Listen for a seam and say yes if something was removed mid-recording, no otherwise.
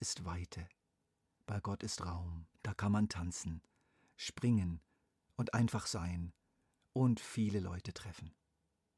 yes